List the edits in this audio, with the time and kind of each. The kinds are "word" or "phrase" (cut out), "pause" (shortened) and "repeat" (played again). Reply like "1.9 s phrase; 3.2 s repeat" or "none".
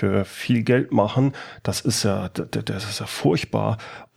none